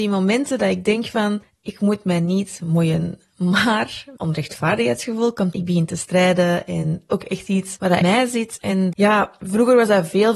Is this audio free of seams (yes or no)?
no